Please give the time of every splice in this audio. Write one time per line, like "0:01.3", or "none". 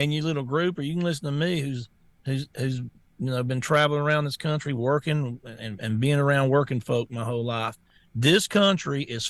none